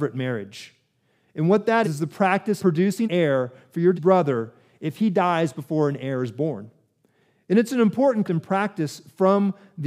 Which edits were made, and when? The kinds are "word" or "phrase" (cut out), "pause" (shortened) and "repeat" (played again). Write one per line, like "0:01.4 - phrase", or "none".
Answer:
0:01.8 - word
0:02.6 - word
0:03.0 - word
0:03.9 - word
0:08.2 - word